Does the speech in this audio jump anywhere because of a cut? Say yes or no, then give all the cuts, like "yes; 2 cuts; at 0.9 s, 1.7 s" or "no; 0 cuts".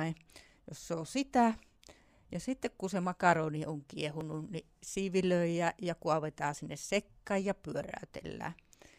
no; 0 cuts